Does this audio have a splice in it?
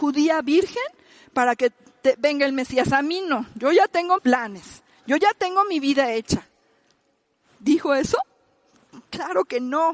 yes; 1 cut; at 4.2 s

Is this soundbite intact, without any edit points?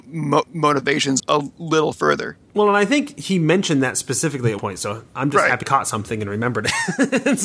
no; 3 cuts; at 1.2 s, 4.6 s, 5.6 s

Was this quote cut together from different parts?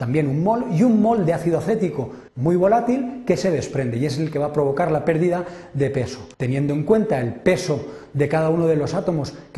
yes; 2 cuts; at 2.3 s, 6.3 s

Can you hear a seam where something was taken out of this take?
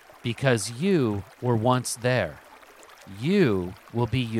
no; 0 cuts

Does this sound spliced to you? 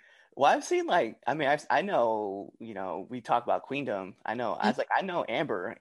no; 0 cuts

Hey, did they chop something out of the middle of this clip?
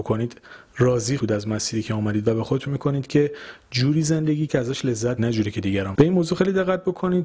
yes; 5 cuts; at 1.2 s, 2.7 s, 4.5 s, 5.2 s, 5.9 s

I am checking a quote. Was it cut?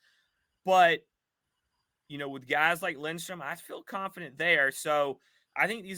no; 0 cuts

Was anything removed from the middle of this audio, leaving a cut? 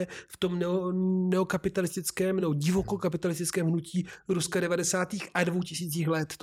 no; 0 cuts

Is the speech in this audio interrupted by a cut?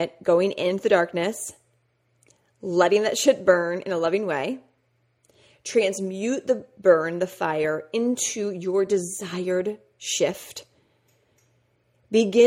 no; 0 cuts

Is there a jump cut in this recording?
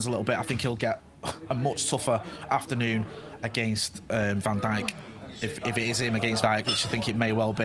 yes; 1 cut; at 6.4 s

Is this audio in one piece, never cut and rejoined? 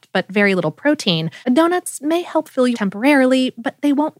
no; 2 cuts; at 1.4 s, 2.7 s

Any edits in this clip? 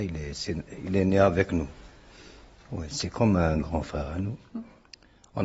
no; 0 cuts

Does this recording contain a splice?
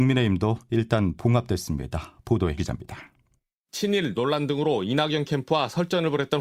yes; 1 cut; at 2.6 s

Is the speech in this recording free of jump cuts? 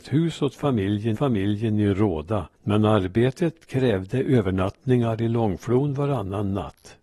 no; 2 cuts; at 1.1 s, 2.5 s

